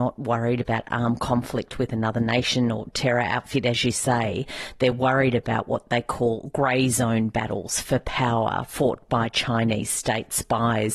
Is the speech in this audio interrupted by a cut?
no; 0 cuts

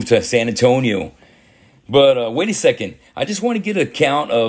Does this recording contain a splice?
no; 0 cuts

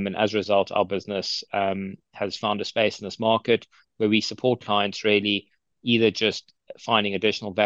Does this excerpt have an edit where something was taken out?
no; 0 cuts

